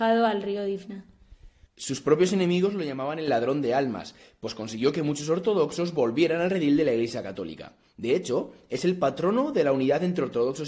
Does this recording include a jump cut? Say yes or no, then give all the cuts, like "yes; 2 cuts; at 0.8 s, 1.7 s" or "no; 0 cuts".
no; 0 cuts